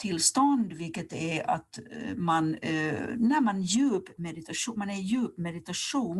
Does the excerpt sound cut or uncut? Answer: uncut